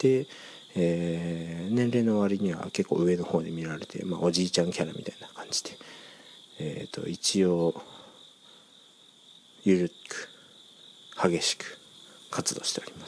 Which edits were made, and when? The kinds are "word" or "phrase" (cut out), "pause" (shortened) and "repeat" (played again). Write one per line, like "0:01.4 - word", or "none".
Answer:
none